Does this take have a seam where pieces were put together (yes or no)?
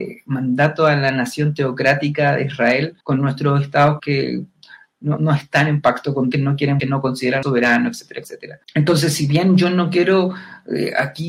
yes